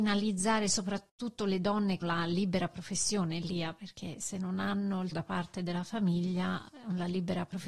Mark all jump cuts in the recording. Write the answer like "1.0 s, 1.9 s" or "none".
2.0 s, 5.1 s